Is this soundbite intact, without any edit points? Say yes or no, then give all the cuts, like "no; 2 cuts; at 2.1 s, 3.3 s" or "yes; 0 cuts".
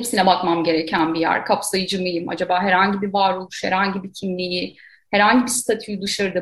yes; 0 cuts